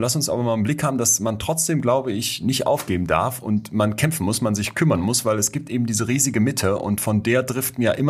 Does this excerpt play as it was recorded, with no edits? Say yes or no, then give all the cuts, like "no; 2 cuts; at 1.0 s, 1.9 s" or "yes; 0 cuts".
yes; 0 cuts